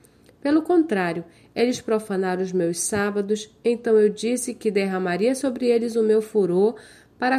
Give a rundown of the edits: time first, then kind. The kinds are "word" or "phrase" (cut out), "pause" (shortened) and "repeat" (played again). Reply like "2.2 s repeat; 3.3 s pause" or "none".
none